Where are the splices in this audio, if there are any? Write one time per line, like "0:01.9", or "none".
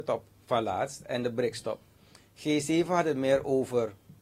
none